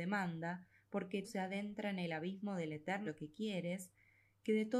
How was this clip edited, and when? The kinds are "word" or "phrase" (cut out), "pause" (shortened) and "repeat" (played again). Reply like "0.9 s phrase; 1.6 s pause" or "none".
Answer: 1.2 s word; 3.1 s word